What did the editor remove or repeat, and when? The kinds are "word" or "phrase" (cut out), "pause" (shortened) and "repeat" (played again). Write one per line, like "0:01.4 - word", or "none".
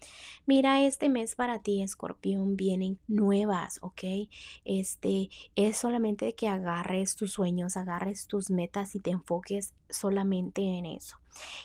0:03.0 - word